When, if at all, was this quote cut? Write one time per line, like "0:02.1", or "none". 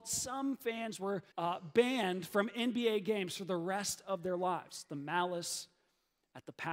0:01.3